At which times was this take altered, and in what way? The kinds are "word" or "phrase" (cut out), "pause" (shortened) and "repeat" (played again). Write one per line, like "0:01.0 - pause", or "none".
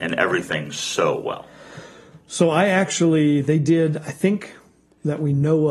none